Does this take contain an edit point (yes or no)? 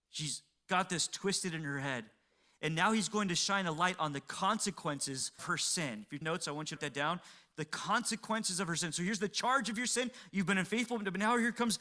yes